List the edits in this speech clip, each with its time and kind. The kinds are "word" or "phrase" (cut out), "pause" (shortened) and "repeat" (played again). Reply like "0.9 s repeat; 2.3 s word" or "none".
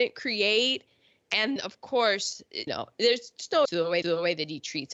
1.6 s word; 2.7 s word; 3.6 s word; 4.0 s repeat